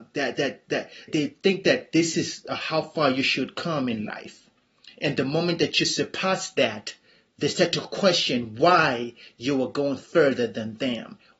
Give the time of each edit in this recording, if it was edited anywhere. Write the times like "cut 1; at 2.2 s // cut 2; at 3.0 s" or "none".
cut 1; at 1.1 s